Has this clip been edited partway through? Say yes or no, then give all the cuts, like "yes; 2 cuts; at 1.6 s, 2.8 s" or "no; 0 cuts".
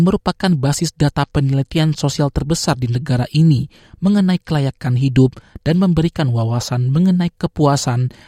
no; 0 cuts